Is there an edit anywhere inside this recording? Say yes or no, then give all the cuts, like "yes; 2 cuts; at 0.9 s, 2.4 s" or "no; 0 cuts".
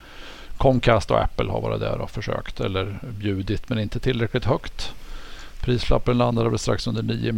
no; 0 cuts